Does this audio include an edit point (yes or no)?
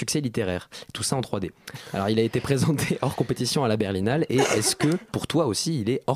yes